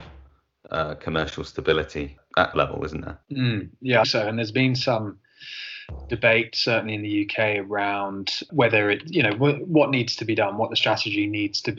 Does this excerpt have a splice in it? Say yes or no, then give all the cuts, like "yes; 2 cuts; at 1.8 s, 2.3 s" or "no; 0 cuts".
yes; 4 cuts; at 2.5 s, 3.2 s, 4.0 s, 8.5 s